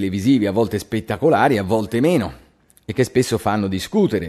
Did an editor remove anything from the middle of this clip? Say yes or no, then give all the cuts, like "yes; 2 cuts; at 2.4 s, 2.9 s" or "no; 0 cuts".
no; 0 cuts